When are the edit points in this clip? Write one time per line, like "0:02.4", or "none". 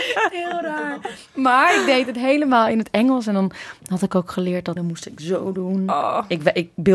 0:04.8